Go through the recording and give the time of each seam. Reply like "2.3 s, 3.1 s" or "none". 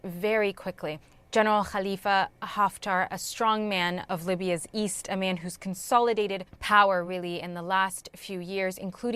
none